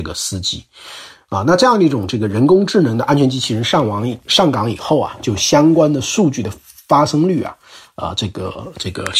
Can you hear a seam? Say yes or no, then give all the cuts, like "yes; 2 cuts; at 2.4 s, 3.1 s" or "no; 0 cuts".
no; 0 cuts